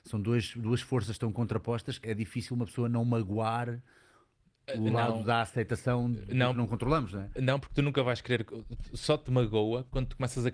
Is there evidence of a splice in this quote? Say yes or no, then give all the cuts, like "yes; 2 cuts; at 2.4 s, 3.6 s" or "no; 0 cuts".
yes; 1 cut; at 2.0 s